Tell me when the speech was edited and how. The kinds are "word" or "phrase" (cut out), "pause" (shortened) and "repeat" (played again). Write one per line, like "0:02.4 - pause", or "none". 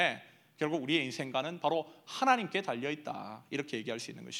none